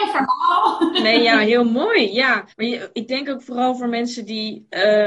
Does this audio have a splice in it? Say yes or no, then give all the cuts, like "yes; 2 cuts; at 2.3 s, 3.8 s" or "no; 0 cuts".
yes; 1 cut; at 2.5 s